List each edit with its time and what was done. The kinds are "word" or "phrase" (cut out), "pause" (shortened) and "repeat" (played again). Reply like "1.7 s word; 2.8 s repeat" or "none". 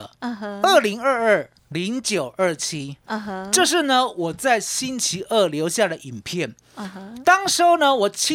1.6 s pause

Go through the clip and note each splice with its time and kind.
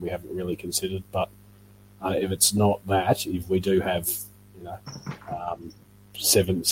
none

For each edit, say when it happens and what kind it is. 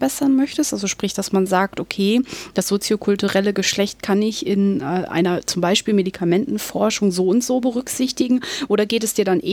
none

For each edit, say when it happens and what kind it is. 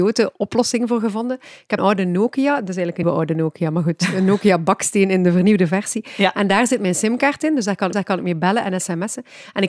1.8 s word; 3.0 s word; 7.9 s repeat

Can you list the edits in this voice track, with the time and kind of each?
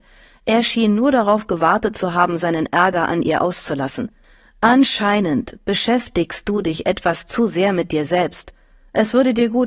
none

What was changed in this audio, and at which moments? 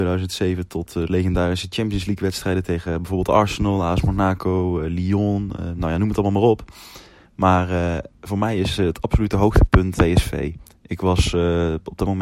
8.1 s pause; 10.0 s phrase

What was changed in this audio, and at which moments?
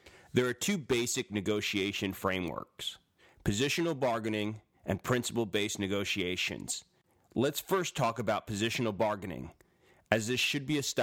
none

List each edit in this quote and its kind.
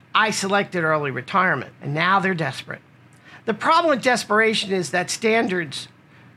1.8 s pause

